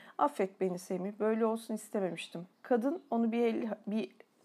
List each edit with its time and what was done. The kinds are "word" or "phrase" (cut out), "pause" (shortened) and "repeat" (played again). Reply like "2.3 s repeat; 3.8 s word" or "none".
2.5 s pause